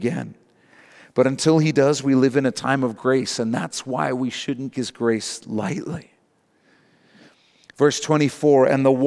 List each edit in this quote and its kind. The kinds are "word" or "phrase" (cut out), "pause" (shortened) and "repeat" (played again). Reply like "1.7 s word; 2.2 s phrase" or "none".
4.7 s word